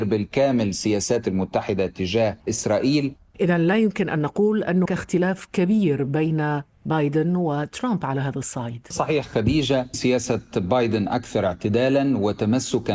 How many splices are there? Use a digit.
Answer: 5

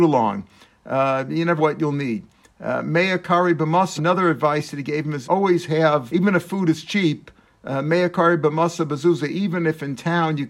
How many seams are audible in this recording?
4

